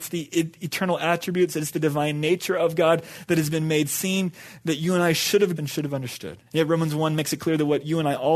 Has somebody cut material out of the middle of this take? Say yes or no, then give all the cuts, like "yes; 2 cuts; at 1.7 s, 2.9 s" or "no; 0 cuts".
yes; 2 cuts; at 5.6 s, 6.5 s